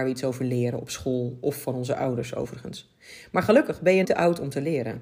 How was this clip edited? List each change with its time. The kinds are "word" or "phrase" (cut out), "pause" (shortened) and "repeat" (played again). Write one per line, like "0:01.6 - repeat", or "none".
0:04.0 - word